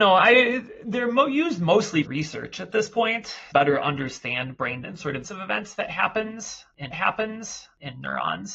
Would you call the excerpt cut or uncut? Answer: cut